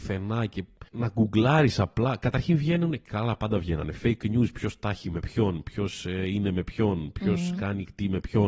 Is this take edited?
no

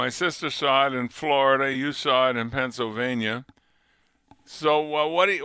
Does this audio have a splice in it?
no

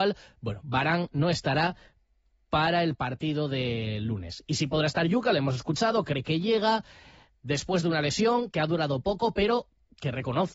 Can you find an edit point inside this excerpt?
no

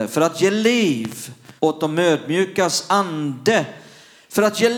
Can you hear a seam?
yes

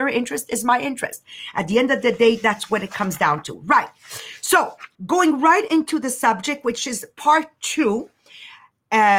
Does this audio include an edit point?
yes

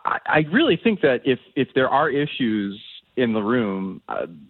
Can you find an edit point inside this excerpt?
no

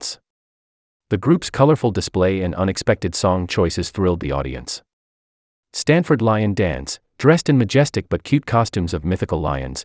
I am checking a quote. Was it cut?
no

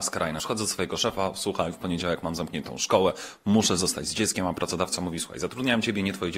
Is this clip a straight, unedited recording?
yes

